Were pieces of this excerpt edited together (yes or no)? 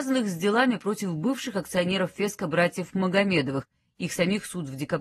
no